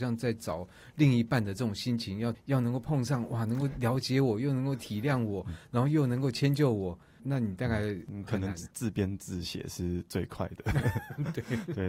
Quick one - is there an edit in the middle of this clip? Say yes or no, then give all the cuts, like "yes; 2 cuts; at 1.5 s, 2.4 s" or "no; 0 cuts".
no; 0 cuts